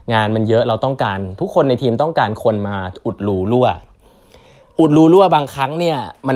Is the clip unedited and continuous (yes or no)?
yes